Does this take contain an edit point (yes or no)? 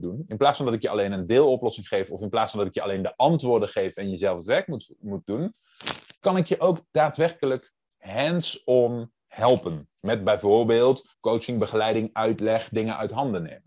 yes